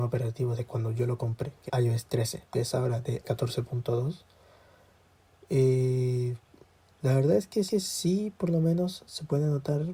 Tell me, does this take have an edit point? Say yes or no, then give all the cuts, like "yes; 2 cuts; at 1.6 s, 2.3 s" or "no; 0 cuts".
yes; 5 cuts; at 1.7 s, 2.5 s, 3.2 s, 6.5 s, 7.7 s